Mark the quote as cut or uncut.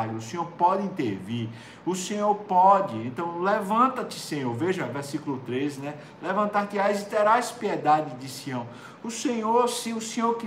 uncut